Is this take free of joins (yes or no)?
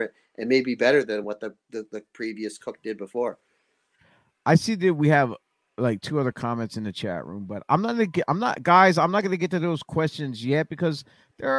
yes